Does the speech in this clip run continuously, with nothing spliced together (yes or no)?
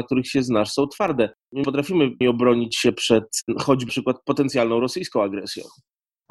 no